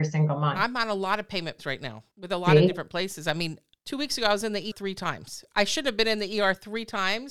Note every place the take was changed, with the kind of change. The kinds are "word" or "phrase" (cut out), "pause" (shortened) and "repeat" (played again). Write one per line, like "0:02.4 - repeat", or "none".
0:01.6 - word
0:02.1 - pause
0:03.8 - pause
0:04.7 - word